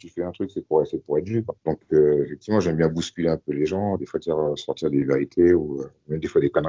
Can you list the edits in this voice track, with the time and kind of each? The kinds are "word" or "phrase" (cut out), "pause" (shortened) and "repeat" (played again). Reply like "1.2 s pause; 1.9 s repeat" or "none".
1.6 s pause